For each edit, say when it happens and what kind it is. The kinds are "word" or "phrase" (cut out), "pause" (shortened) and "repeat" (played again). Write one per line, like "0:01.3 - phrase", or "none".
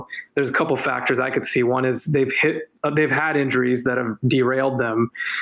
0:02.8 - pause